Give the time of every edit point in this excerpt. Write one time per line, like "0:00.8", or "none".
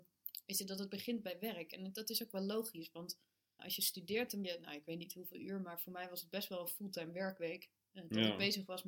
0:03.6
0:04.4